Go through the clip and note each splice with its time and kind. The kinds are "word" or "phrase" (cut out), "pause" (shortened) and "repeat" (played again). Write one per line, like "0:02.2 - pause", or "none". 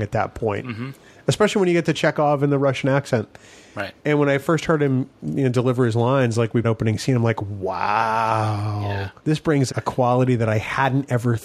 0:04.0 - pause
0:06.6 - phrase
0:09.2 - pause
0:09.7 - word